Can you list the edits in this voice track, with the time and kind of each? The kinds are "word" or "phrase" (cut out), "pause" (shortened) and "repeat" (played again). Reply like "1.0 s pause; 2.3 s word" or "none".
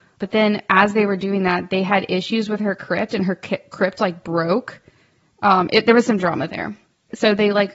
none